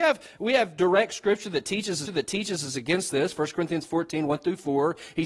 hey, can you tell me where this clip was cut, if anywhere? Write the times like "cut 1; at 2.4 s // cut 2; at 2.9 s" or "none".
cut 1; at 2.1 s